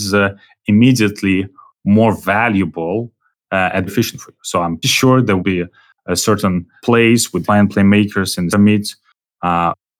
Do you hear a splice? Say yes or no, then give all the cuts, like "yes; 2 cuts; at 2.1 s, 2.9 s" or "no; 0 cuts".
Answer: yes; 6 cuts; at 3.9 s, 4.8 s, 5.4 s, 6.8 s, 7.5 s, 8.5 s